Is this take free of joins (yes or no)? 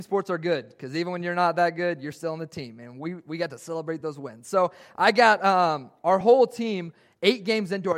yes